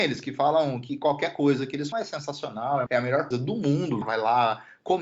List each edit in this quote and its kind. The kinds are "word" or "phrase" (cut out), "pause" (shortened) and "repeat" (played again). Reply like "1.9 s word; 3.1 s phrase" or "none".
1.9 s word; 2.9 s word; 3.3 s word; 4.0 s phrase

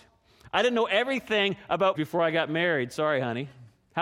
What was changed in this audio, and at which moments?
1.9 s word

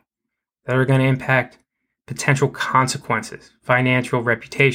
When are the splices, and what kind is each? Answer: none

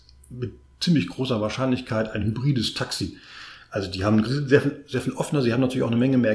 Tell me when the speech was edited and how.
4.2 s phrase

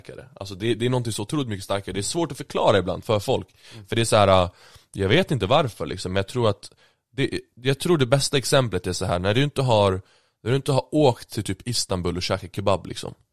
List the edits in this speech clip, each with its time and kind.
none

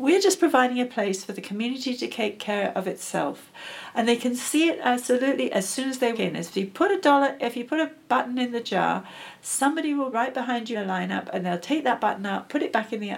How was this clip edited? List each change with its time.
6.1 s word; 10.1 s word; 10.7 s phrase

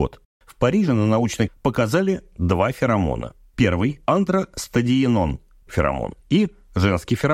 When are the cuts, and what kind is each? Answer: 1.5 s word; 4.1 s word; 5.7 s word; 6.2 s pause

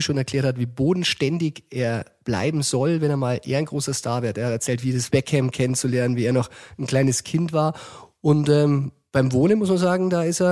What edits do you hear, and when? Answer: 5.1 s phrase

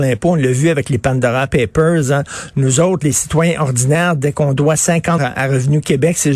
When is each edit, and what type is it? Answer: 5.2 s word

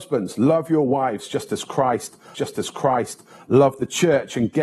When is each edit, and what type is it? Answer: 2.3 s repeat

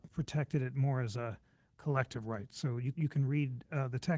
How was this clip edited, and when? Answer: 2.9 s word

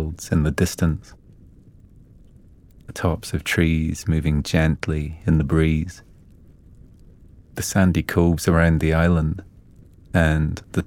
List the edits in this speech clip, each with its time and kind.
none

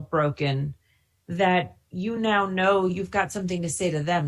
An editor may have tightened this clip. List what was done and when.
none

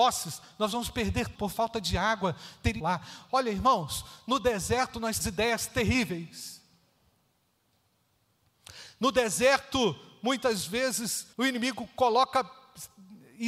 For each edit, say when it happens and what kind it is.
1.3 s word; 2.8 s phrase; 5.2 s word; 11.3 s pause

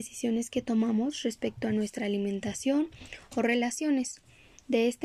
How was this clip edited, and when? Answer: none

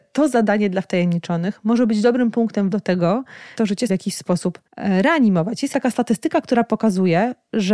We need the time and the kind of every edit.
2.7 s word; 3.6 s word; 3.9 s word; 4.7 s pause; 5.7 s word

